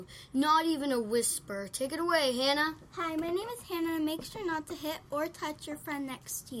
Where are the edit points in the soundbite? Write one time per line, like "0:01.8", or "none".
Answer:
none